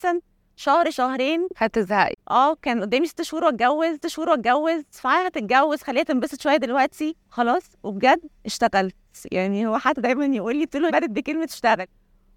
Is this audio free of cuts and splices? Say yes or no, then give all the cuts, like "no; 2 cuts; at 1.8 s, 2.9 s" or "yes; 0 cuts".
no; 4 cuts; at 4.0 s, 7.2 s, 8.4 s, 10.9 s